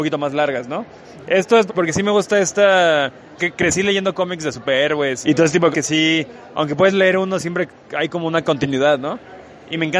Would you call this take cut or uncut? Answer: cut